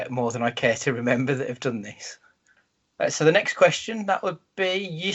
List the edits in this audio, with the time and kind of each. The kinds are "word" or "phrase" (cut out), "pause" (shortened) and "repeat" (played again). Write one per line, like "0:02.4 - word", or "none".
none